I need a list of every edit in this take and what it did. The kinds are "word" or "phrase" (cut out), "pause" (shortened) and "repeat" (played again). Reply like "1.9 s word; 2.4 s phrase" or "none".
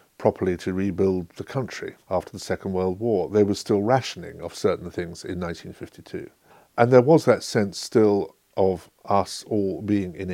2.0 s pause; 6.5 s pause